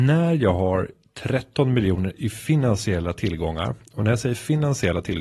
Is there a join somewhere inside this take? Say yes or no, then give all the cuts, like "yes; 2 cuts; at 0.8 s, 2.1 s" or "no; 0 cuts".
no; 0 cuts